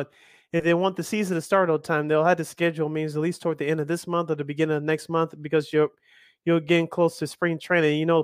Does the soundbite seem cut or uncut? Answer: uncut